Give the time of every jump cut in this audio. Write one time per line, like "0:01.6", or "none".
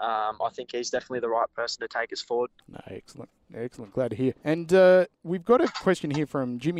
0:02.6
0:04.4
0:05.1